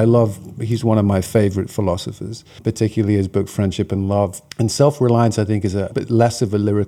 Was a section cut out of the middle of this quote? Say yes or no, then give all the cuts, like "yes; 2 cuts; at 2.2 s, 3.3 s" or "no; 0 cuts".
yes; 2 cuts; at 4.5 s, 5.9 s